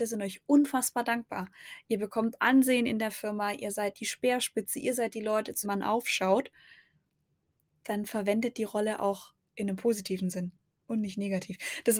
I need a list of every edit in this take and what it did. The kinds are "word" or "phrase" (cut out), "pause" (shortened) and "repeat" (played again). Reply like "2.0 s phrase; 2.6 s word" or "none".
5.6 s word